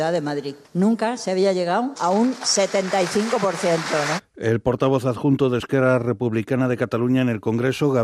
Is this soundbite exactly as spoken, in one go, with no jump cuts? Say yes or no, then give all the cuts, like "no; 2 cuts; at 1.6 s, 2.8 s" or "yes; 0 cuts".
yes; 0 cuts